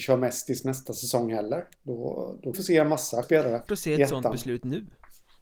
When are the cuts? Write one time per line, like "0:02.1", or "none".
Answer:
0:01.7
0:02.5
0:03.2
0:03.7